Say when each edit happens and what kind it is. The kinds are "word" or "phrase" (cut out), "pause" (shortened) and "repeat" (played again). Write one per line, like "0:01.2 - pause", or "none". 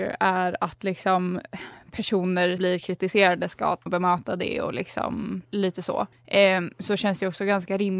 0:02.6 - word
0:03.9 - phrase
0:05.5 - pause
0:06.1 - pause